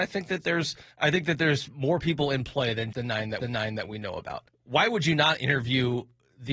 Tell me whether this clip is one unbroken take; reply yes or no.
no